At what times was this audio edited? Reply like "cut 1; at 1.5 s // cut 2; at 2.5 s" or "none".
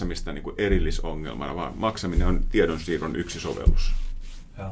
none